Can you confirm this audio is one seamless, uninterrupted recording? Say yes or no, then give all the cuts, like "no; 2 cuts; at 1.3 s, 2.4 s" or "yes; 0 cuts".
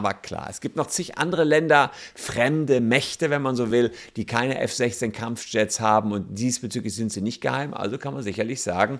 yes; 0 cuts